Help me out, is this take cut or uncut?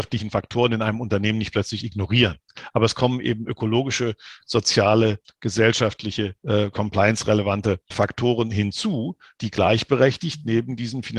cut